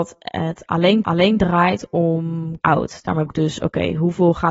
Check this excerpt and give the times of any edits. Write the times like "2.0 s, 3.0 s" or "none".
1.0 s, 2.6 s, 3.3 s